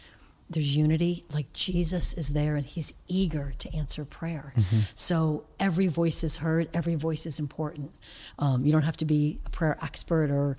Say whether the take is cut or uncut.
uncut